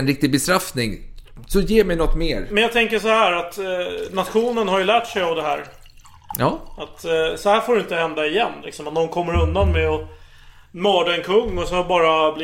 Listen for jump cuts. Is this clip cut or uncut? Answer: uncut